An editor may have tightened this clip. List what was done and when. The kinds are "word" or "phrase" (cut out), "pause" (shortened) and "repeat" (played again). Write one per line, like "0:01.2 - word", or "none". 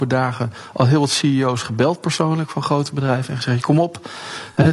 none